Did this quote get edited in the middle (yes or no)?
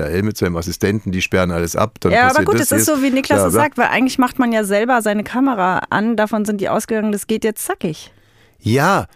no